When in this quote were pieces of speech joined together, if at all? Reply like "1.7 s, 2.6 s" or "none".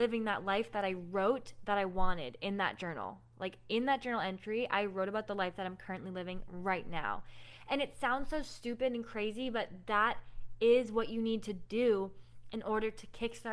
none